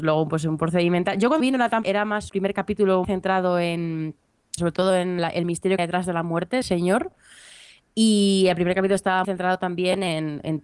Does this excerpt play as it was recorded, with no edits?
no; 9 cuts; at 1.4 s, 1.8 s, 2.3 s, 3.0 s, 4.6 s, 5.2 s, 5.8 s, 6.6 s, 9.2 s

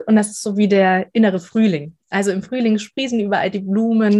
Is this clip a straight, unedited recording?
yes; 0 cuts

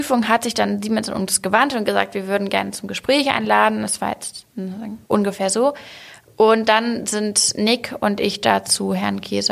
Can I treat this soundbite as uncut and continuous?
no; 1 cut; at 5.0 s

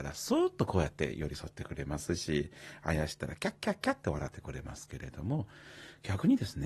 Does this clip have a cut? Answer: no; 0 cuts

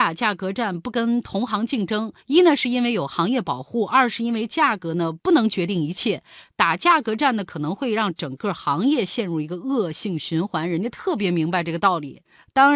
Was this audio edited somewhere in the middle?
yes; 1 cut; at 2.2 s

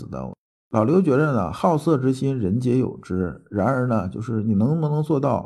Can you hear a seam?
no; 0 cuts

